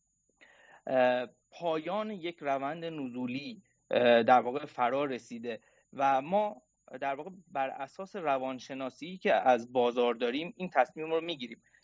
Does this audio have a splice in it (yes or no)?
no